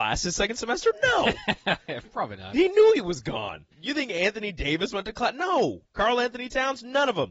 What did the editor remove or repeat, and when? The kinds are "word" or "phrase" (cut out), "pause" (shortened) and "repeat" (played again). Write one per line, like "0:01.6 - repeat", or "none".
0:03.7 - pause
0:05.9 - pause